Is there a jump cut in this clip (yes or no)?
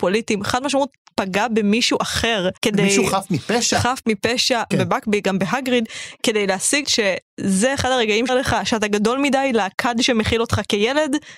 yes